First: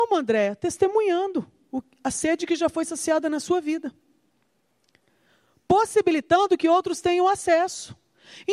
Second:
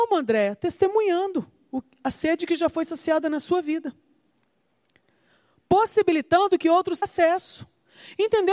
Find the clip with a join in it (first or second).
second